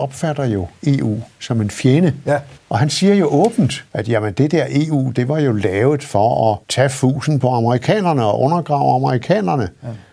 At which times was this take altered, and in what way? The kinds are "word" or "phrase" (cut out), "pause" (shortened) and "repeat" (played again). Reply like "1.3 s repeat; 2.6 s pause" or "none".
2.6 s pause; 3.9 s pause; 6.6 s pause

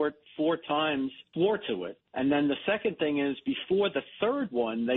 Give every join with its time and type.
1.3 s word; 2.1 s pause

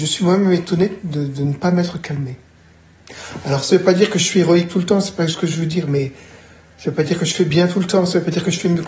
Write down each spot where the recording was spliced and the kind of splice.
none

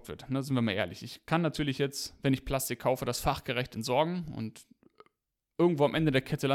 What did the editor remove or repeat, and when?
none

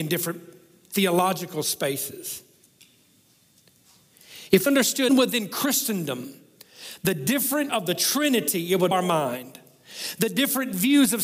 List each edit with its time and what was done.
4.7 s word; 5.1 s word; 7.7 s word; 8.9 s word

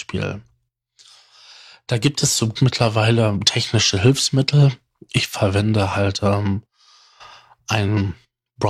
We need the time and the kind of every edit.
2.6 s word

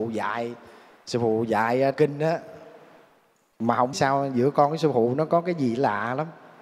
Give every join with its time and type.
1.9 s word; 3.9 s word

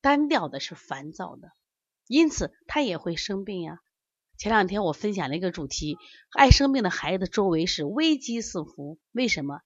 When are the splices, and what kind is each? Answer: none

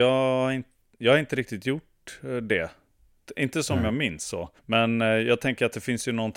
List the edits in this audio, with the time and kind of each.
4.6 s pause

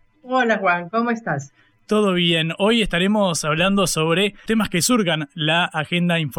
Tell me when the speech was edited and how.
4.5 s word

